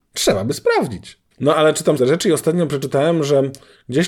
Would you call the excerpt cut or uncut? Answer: cut